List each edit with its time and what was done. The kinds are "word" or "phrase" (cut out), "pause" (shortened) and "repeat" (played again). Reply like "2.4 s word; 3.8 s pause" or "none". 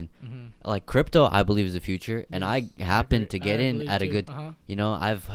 4.2 s word